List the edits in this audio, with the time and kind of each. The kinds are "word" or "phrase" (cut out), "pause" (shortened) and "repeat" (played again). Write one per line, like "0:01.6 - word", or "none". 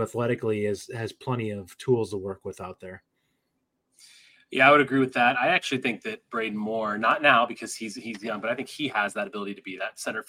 none